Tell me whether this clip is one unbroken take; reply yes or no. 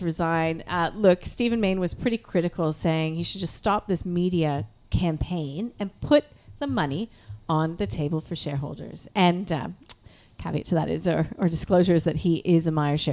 yes